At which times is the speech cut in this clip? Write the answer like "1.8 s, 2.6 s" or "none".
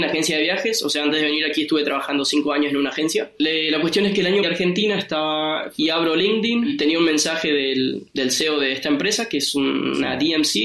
4.4 s